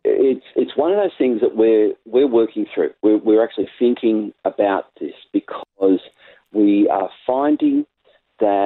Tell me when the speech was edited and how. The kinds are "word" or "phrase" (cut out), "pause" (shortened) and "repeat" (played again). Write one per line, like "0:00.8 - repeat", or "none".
none